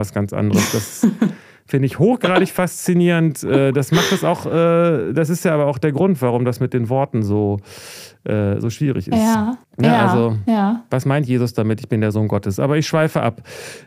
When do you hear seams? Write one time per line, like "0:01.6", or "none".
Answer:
0:09.6